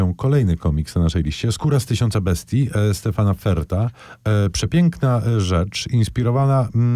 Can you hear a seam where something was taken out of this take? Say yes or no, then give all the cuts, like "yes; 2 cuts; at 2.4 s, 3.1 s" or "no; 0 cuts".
no; 0 cuts